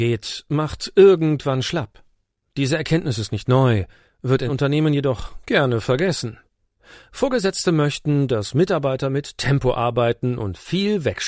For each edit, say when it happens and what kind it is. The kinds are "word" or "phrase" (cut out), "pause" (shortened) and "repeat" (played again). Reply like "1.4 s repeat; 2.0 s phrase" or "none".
4.5 s word